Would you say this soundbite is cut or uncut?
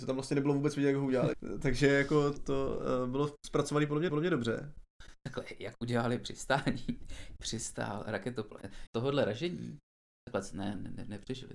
cut